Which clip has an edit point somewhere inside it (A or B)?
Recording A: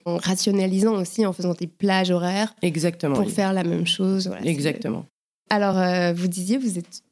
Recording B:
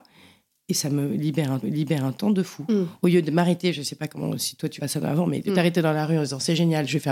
B